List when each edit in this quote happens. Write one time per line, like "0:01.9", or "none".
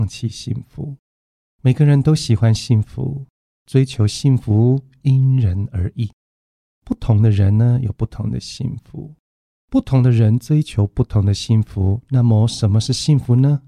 none